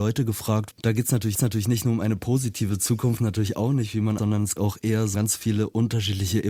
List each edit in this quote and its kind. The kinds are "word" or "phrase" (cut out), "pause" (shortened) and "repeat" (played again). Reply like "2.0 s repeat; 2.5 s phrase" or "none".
1.4 s repeat; 3.2 s phrase; 4.2 s phrase; 4.6 s word; 5.1 s word